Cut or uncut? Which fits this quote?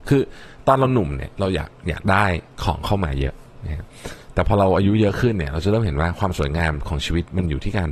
cut